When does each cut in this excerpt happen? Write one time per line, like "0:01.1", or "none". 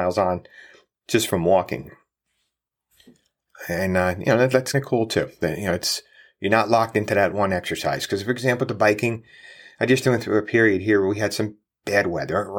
0:04.7